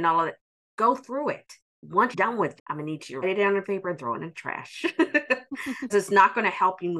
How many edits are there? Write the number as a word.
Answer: six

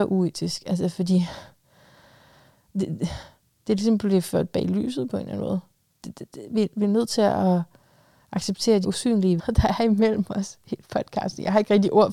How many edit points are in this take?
two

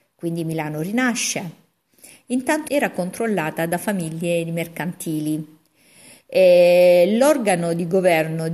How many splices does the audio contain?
one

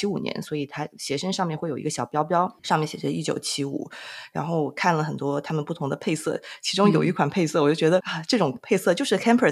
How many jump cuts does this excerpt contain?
one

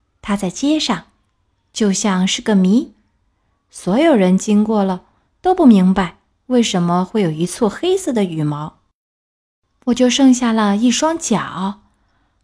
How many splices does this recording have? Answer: zero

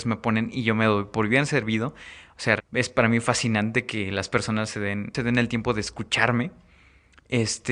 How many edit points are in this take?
one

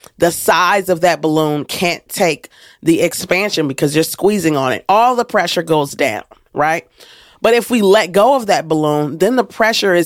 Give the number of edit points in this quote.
zero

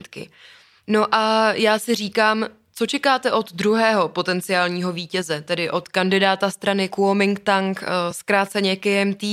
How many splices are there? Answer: zero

